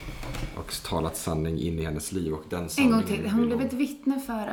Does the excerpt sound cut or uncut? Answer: uncut